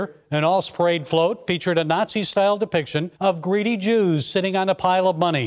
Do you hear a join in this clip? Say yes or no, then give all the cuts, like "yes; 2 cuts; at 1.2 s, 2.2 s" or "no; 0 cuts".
yes; 1 cut; at 3.1 s